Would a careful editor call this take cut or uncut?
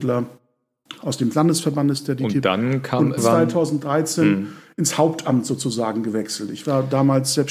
cut